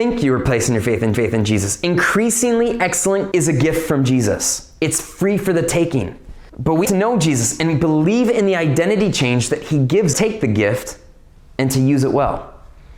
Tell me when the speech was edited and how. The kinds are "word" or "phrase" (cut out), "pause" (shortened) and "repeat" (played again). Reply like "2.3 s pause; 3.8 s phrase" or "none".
1.1 s repeat; 3.3 s word; 6.5 s pause; 6.8 s word; 10.1 s phrase